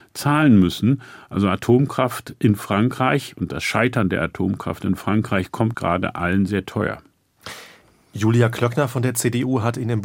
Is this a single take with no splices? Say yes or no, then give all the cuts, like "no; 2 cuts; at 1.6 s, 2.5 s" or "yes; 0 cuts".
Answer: no; 2 cuts; at 5.7 s, 6.5 s